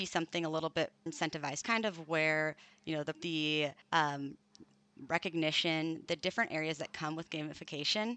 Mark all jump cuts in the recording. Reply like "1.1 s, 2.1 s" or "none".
1.1 s, 1.6 s, 3.1 s, 3.8 s